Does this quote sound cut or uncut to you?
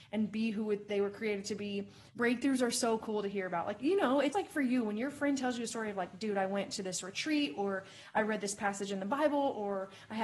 cut